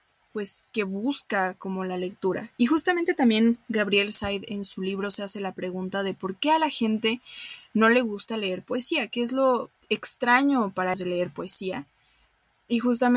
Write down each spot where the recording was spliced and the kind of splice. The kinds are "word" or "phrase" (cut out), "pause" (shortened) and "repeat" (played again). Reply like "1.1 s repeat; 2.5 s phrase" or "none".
9.8 s pause; 10.9 s word